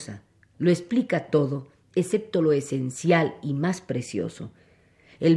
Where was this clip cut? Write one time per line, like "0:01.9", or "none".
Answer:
none